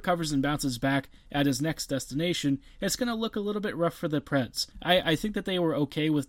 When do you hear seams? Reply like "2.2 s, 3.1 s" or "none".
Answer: 4.7 s